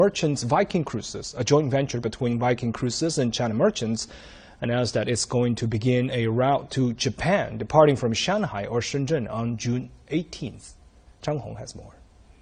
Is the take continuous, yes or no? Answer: yes